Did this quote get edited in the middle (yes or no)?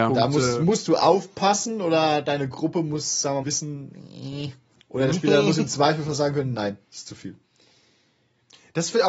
yes